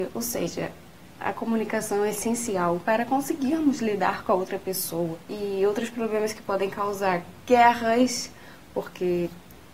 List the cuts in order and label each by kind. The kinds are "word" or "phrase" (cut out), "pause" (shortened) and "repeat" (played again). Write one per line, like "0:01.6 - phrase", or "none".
0:05.2 - pause